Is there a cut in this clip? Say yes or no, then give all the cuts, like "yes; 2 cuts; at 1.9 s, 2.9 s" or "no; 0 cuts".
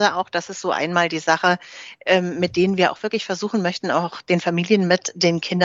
no; 0 cuts